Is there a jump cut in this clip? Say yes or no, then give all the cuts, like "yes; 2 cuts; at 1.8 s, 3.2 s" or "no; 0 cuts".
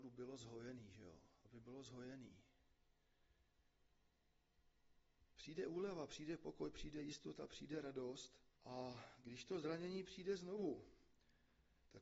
yes; 2 cuts; at 5.3 s, 8.6 s